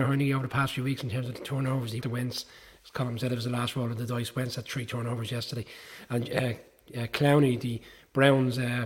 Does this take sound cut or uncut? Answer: cut